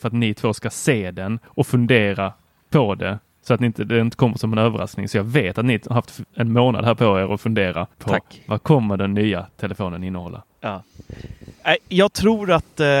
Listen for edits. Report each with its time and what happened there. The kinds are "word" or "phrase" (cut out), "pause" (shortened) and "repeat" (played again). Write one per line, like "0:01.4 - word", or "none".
0:07.9 - pause

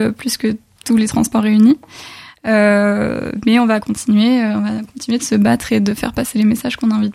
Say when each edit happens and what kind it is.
none

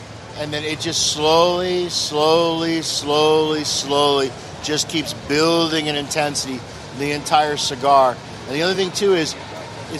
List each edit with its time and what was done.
none

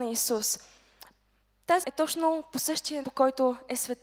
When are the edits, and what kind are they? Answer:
0:01.8 - word
0:03.0 - word

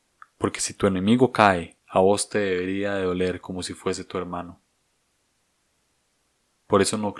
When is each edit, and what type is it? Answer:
0:01.8 - pause

